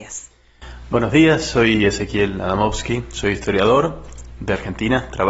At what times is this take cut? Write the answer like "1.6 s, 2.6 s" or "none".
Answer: none